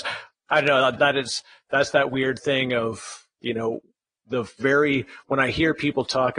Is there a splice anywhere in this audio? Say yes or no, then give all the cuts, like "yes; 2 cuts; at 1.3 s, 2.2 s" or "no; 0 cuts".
yes; 1 cut; at 1.0 s